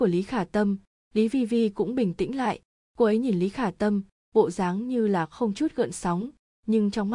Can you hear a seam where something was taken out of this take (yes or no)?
no